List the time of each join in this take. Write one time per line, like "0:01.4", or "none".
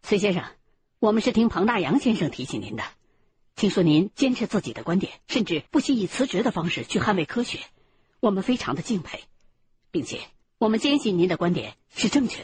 0:05.2
0:05.7
0:10.4

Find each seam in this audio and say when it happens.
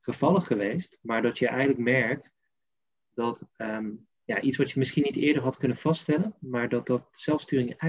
none

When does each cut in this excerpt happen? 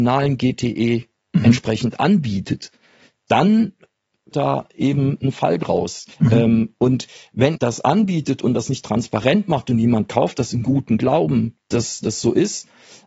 0:04.3
0:06.1
0:07.6

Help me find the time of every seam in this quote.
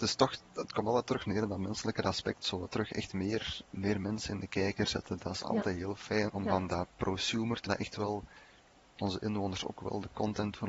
0:03.6
0:06.3
0:07.7

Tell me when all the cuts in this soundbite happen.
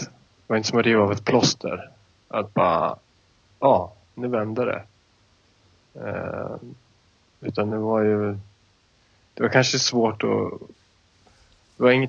none

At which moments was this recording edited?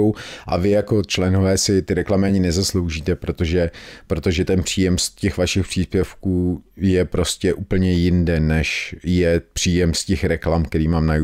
none

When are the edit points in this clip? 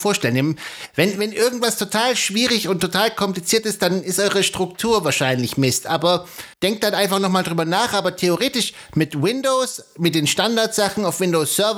0:06.5

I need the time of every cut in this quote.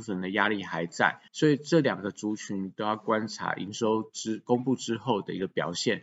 0:01.3

